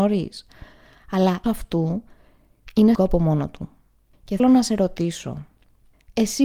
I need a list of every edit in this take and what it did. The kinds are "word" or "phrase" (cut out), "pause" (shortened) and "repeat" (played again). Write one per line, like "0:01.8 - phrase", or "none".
0:01.4 - word
0:02.9 - word
0:04.4 - word